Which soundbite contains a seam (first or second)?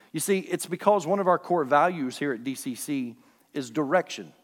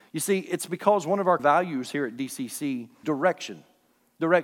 second